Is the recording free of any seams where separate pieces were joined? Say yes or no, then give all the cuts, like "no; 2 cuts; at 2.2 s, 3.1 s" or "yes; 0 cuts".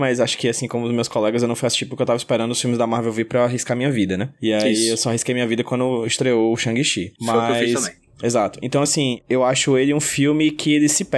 yes; 0 cuts